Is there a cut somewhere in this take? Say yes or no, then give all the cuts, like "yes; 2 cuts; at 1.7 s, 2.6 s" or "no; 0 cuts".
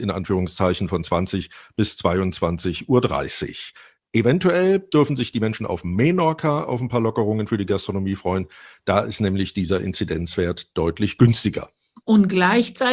no; 0 cuts